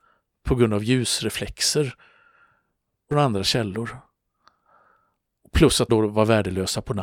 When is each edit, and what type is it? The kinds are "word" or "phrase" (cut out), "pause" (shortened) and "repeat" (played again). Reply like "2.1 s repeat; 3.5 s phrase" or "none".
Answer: 3.1 s phrase; 5.9 s word